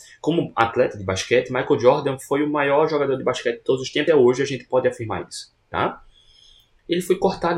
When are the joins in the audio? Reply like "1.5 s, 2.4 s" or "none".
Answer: 4.1 s, 5.6 s